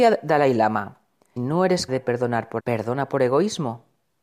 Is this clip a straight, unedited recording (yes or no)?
no